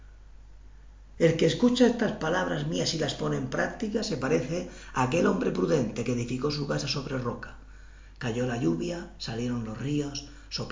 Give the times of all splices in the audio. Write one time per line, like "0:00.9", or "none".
none

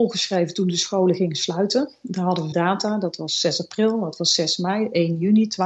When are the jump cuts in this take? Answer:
0:02.5

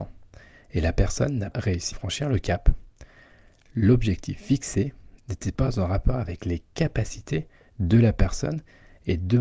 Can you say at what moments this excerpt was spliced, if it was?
0:01.5
0:01.9

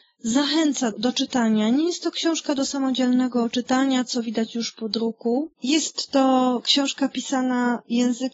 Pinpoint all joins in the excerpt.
0:00.9
0:05.5

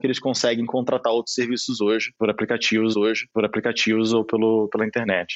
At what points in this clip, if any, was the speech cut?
0:02.9

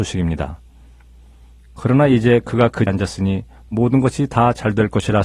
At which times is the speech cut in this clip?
0:02.9

